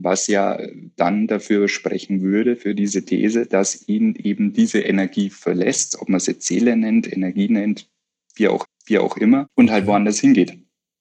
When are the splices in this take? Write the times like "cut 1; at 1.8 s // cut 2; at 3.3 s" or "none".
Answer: cut 1; at 8.6 s